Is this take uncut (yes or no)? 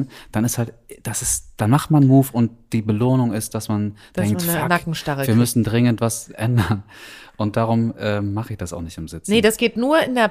yes